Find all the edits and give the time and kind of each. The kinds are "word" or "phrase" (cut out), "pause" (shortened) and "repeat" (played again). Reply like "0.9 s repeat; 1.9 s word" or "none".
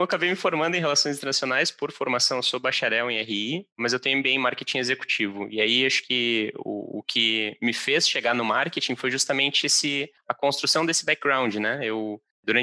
none